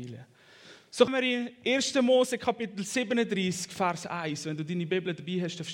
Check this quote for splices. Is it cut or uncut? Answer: cut